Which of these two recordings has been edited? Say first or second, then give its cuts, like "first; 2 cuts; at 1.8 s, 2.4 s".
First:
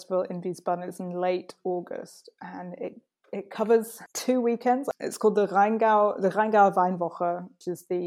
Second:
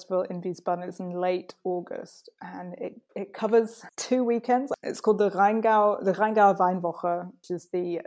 second; 1 cut; at 3.1 s